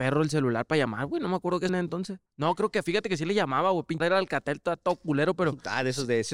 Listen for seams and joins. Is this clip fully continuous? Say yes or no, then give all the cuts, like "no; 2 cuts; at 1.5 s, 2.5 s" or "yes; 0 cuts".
no; 3 cuts; at 1.7 s, 2.3 s, 4.0 s